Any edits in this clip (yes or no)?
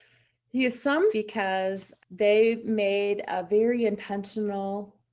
yes